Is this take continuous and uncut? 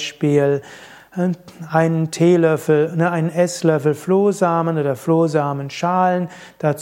yes; 0 cuts

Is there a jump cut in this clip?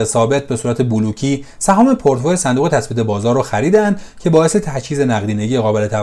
no; 0 cuts

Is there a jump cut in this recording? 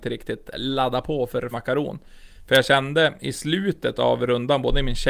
yes; 1 cut; at 1.5 s

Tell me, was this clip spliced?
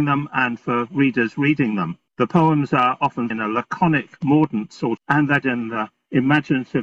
yes; 4 cuts; at 2.1 s, 3.3 s, 5.0 s, 5.4 s

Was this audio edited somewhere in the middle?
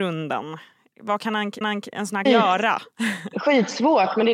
yes; 2 cuts; at 1.6 s, 2.3 s

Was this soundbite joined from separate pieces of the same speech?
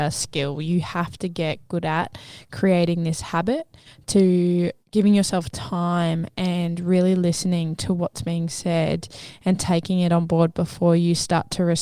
yes; 1 cut; at 4.8 s

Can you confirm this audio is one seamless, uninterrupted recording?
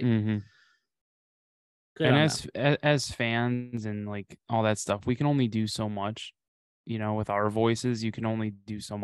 yes; 0 cuts

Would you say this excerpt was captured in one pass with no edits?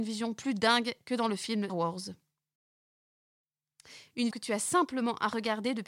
no; 2 cuts; at 1.7 s, 4.3 s

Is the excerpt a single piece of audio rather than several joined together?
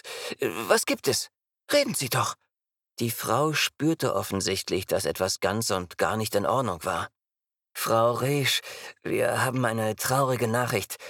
yes; 0 cuts

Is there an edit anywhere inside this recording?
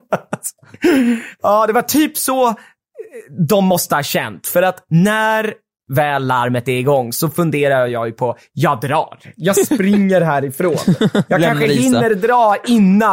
no; 0 cuts

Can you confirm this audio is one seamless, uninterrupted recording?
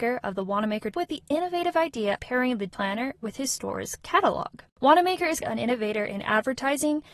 no; 5 cuts; at 0.9 s, 2.2 s, 2.7 s, 4.7 s, 5.4 s

